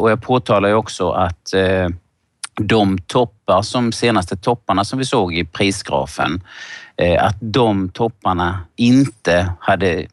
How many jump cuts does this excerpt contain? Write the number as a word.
zero